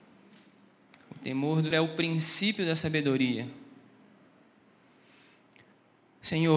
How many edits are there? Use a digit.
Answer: 1